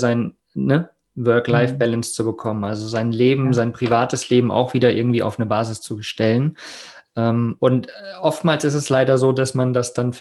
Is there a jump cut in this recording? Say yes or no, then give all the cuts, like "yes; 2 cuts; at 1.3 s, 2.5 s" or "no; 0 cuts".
no; 0 cuts